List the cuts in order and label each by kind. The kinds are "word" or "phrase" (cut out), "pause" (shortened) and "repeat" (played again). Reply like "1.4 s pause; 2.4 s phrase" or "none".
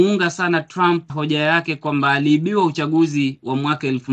1.1 s word

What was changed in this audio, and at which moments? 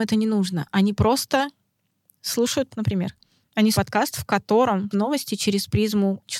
2.7 s word; 3.7 s word; 4.9 s word

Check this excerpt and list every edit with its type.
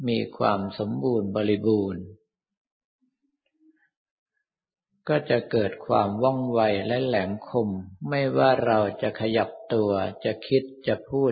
8.0 s pause

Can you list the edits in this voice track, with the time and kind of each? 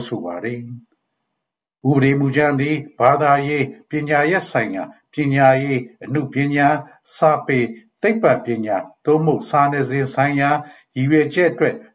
none

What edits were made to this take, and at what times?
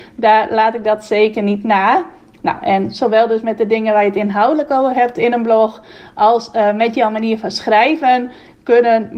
none

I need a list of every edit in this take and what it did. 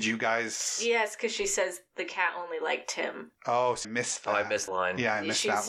3.3 s pause; 3.8 s word; 4.7 s word

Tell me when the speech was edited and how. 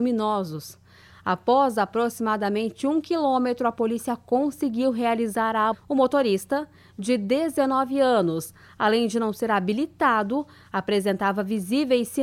5.7 s word

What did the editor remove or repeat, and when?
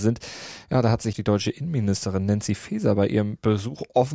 1.1 s word

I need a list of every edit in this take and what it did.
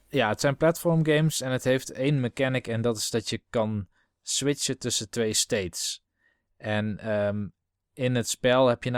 none

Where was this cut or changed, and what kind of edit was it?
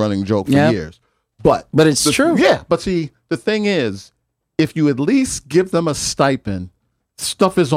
none

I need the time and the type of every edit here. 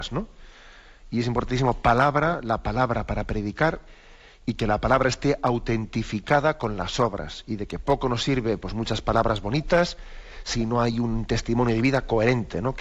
none

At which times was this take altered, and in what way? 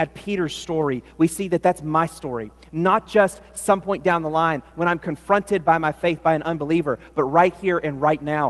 none

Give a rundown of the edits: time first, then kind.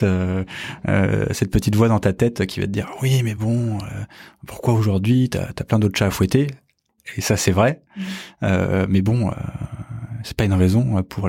none

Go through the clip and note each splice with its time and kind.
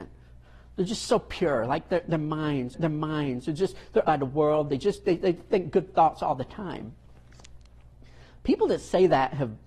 2.7 s repeat; 4.0 s word

